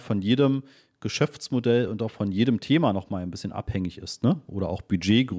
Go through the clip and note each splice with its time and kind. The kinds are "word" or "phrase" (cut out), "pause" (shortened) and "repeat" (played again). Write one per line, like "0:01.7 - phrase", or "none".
none